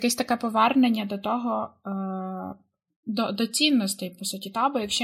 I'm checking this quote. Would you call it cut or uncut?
uncut